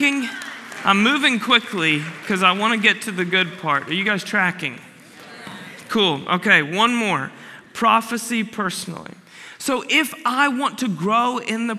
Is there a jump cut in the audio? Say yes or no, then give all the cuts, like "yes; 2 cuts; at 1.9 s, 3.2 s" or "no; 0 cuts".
no; 0 cuts